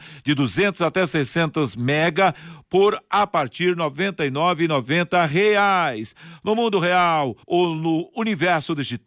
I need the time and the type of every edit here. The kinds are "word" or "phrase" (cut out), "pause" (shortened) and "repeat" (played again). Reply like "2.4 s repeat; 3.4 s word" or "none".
7.4 s pause